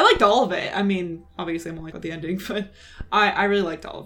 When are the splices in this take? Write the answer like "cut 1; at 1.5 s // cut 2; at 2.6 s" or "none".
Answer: cut 1; at 1.9 s

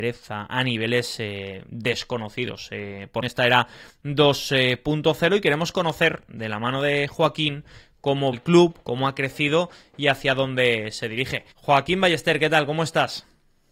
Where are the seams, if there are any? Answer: cut 1; at 3.2 s // cut 2; at 8.3 s // cut 3; at 11.5 s

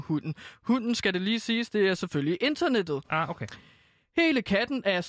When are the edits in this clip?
none

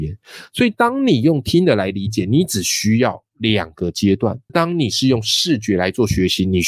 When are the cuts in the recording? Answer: cut 1; at 4.5 s

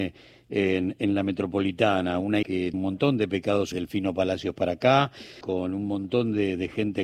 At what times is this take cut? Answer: cut 1; at 2.4 s // cut 2; at 2.7 s // cut 3; at 3.7 s // cut 4; at 5.4 s

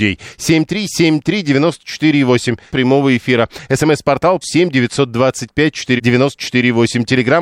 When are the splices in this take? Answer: cut 1; at 2.7 s // cut 2; at 4.4 s // cut 3; at 6.0 s

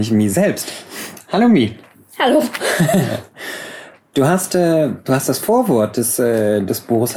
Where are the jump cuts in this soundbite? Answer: none

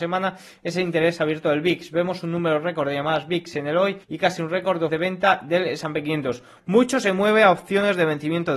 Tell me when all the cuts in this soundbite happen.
cut 1; at 4.0 s // cut 2; at 4.9 s

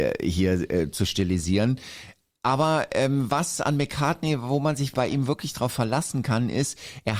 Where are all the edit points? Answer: none

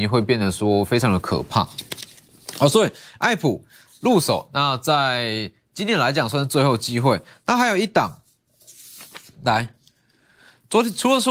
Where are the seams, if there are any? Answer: none

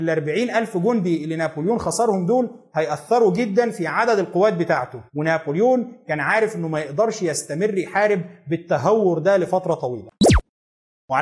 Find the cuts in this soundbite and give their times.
cut 1; at 5.1 s

